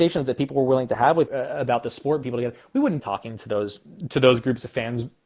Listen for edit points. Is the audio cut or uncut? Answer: cut